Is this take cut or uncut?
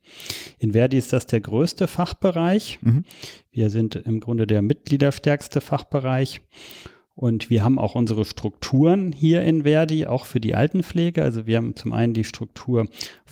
uncut